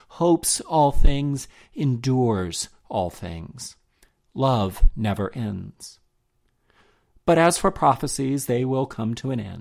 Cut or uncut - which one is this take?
uncut